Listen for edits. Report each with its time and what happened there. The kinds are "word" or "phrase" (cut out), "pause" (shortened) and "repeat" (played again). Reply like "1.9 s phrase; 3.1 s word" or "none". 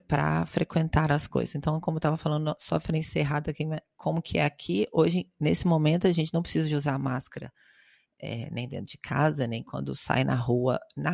none